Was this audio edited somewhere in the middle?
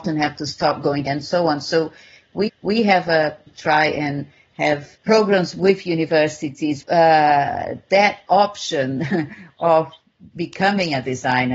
yes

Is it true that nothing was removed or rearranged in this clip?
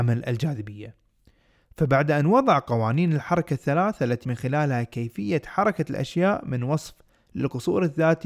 no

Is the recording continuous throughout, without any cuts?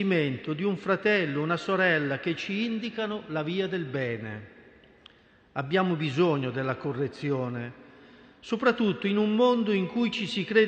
yes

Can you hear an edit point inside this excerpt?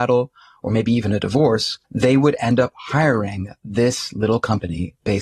yes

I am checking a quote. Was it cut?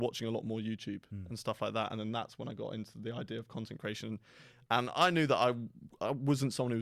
no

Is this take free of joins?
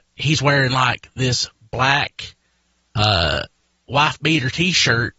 yes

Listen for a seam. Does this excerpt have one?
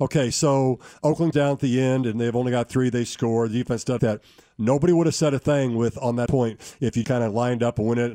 yes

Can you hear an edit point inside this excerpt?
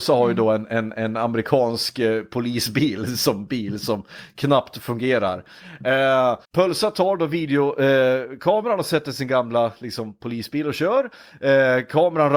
yes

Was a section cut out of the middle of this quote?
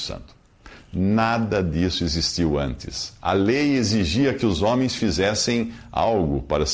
no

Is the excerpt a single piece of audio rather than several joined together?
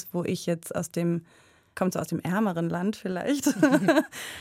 yes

